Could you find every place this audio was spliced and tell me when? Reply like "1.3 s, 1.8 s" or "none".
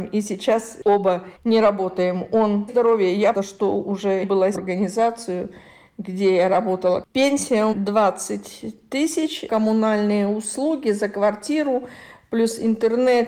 1.4 s, 2.7 s, 3.3 s, 4.2 s, 4.5 s, 7.7 s, 9.5 s